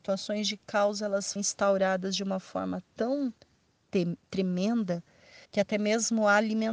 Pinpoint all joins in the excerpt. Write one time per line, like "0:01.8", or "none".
0:01.4
0:05.5